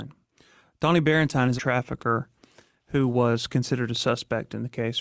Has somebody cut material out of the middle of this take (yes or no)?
yes